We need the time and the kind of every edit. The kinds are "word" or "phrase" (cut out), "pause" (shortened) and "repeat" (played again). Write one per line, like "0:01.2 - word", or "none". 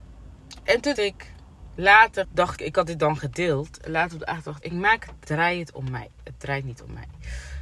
0:01.0 - word
0:02.2 - phrase
0:02.6 - word
0:04.6 - word
0:05.3 - word